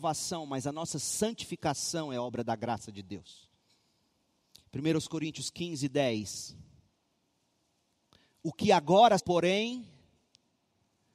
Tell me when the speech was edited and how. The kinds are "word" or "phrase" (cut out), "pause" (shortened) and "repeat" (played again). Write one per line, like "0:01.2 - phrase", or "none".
0:09.2 - word